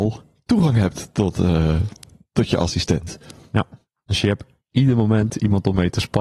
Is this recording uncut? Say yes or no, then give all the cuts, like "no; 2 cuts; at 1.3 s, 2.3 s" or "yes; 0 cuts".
yes; 0 cuts